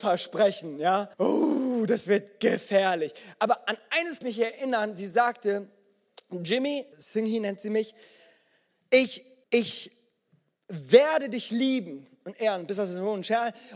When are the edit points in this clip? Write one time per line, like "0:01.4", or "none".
0:01.1
0:04.2
0:06.9
0:09.4